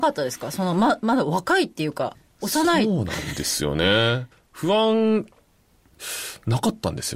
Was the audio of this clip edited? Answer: yes; 1 cut; at 4.3 s

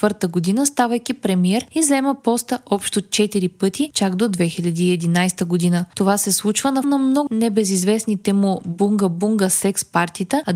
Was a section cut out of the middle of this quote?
yes; 2 cuts; at 6.8 s, 7.3 s

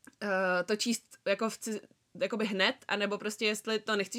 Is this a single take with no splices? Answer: yes; 0 cuts

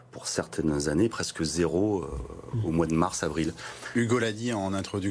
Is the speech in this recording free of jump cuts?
yes; 0 cuts

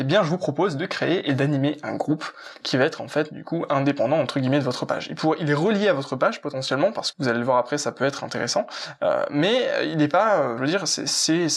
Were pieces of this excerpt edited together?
yes; 2 cuts; at 7.1 s, 10.6 s

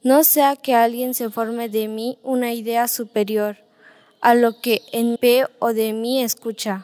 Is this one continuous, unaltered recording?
no; 1 cut; at 5.2 s

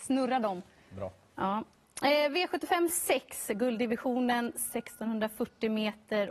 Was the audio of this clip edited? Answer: no; 0 cuts

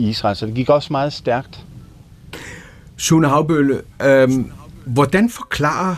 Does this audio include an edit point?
no; 0 cuts

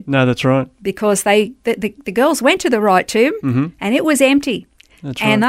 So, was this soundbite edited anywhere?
no; 0 cuts

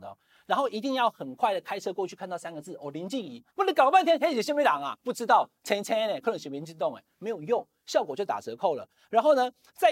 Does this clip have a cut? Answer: yes; 1 cut; at 3.5 s

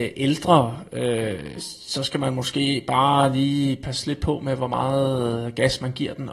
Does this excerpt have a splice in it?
no; 0 cuts

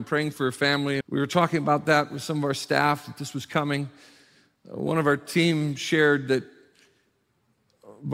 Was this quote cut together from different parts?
yes; 1 cut; at 1.0 s

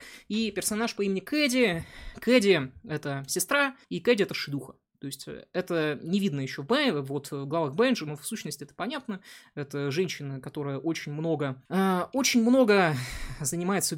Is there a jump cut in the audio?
yes; 2 cuts; at 3.8 s, 11.7 s

